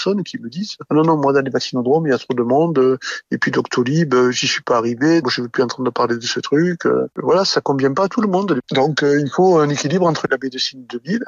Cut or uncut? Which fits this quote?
cut